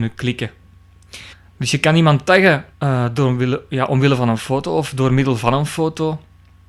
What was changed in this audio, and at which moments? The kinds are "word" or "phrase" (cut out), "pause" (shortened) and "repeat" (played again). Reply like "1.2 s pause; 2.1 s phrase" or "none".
1.3 s pause; 2.7 s pause

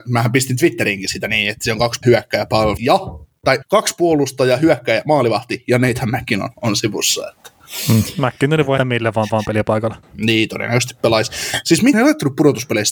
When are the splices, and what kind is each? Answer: 2.0 s word; 2.8 s word; 3.6 s phrase; 6.5 s pause; 8.8 s word; 9.3 s repeat; 10.0 s pause; 11.9 s word

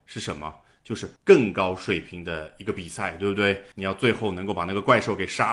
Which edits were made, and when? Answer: 1.2 s pause; 3.7 s pause

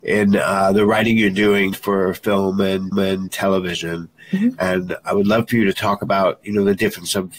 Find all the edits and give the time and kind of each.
1.7 s word; 2.9 s repeat

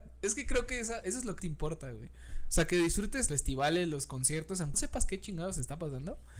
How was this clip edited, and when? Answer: 1.0 s word; 1.4 s word; 3.3 s word; 4.7 s word

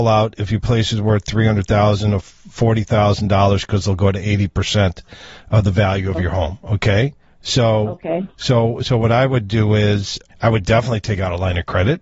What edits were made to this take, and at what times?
10.3 s word

